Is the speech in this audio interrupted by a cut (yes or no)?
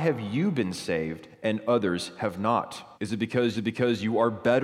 yes